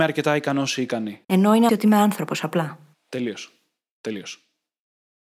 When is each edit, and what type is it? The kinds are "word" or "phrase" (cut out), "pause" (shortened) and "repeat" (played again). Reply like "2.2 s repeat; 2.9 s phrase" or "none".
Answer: 1.2 s pause; 1.7 s word